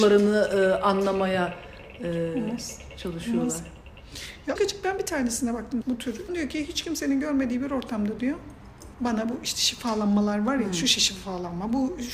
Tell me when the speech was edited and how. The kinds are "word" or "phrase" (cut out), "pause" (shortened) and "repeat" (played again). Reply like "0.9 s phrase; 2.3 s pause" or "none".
4.6 s word; 5.8 s word; 6.3 s phrase; 8.9 s pause